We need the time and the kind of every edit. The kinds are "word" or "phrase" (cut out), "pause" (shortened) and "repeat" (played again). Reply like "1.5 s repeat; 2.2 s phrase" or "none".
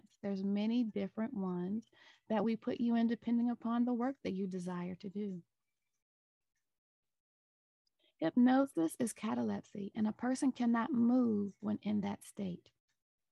none